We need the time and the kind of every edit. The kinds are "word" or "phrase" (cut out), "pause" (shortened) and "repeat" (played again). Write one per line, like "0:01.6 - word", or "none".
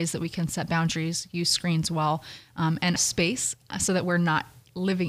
0:03.0 - phrase

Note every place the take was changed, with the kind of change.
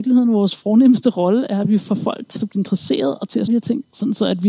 0:02.4 - word
0:03.5 - word

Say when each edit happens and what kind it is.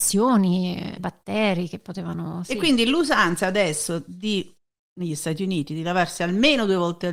0:01.0 - word

